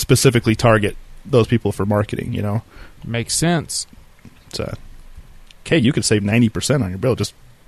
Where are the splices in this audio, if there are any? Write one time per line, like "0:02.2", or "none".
0:03.0
0:05.6